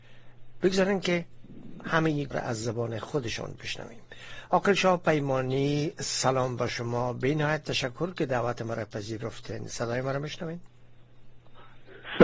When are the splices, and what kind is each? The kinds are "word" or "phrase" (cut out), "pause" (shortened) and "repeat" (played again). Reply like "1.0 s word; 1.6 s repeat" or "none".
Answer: 2.3 s word

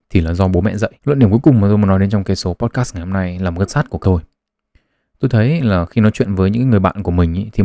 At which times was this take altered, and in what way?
1.0 s pause; 3.7 s word; 4.0 s word

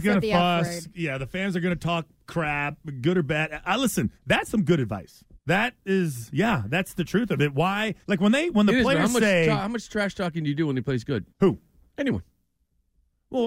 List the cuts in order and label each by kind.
4.2 s pause; 5.4 s pause; 8.0 s pause; 11.3 s pause

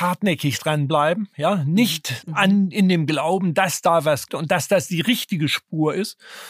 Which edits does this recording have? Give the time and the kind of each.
2.2 s word; 4.3 s word

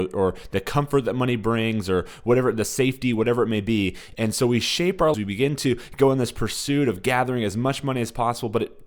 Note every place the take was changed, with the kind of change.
5.1 s word

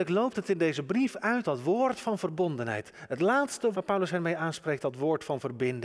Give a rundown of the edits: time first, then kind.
1.4 s word; 3.7 s word; 4.8 s word

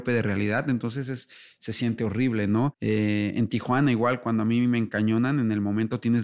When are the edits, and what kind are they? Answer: none

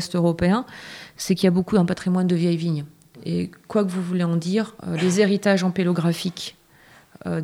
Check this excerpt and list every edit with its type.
4.8 s pause

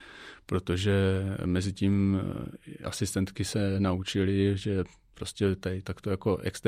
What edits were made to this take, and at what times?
none

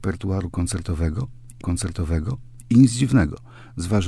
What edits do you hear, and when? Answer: 1.6 s repeat

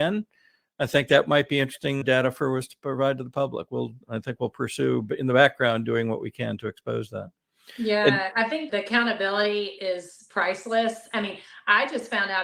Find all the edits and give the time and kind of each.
2.0 s word; 4.0 s pause; 8.7 s word

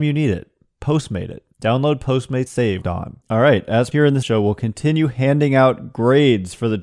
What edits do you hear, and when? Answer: 1.5 s pause; 2.5 s word; 2.8 s phrase; 3.2 s pause; 3.9 s word; 4.2 s phrase

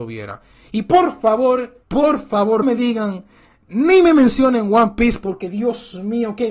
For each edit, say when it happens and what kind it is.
1.8 s pause; 2.6 s word

